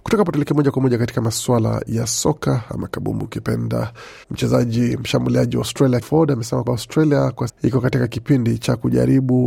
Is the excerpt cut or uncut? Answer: cut